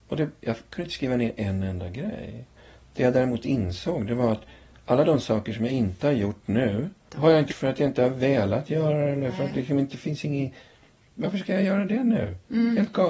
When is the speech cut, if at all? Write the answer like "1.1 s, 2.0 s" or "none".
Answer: 7.5 s, 9.5 s